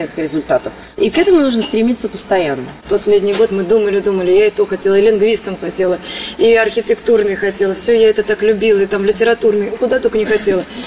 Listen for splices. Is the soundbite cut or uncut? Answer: cut